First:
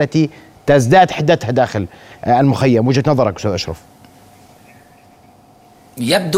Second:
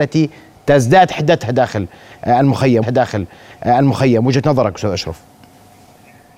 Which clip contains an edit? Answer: second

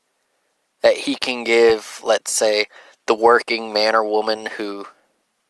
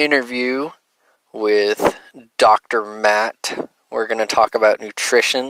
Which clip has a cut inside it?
second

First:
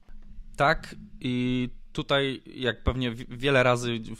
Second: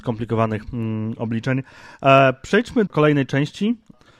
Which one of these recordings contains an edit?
second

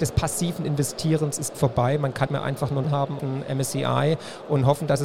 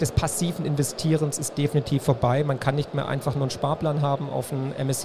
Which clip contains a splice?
first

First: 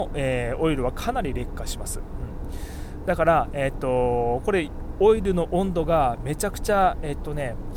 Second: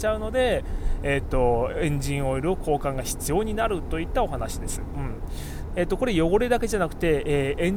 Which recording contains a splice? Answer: second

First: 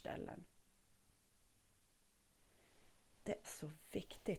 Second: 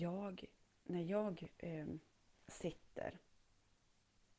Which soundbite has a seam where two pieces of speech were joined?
first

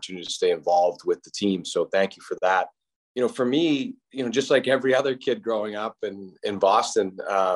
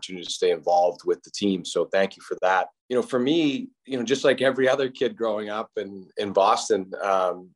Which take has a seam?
second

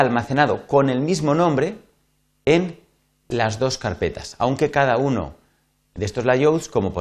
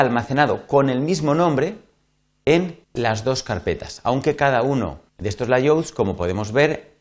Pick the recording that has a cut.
second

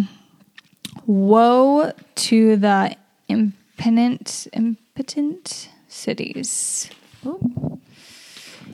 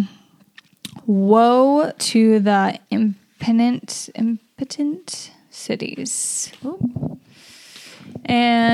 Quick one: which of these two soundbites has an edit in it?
second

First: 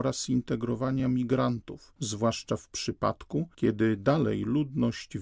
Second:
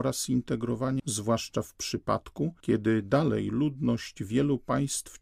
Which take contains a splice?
second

